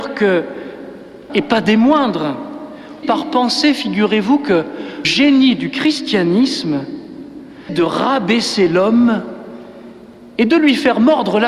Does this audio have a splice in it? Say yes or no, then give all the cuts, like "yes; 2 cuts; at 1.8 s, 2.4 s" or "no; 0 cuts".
yes; 4 cuts; at 1.3 s, 3.0 s, 5.0 s, 7.7 s